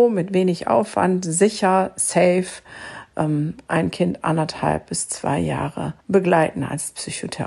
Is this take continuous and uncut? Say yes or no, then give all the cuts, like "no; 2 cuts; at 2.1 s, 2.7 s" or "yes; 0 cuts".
no; 1 cut; at 6.0 s